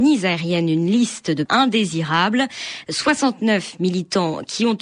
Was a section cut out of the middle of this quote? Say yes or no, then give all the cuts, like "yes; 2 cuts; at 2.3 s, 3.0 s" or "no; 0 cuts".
yes; 1 cut; at 1.5 s